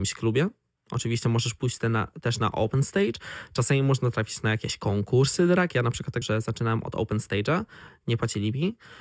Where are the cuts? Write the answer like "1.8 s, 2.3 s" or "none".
6.2 s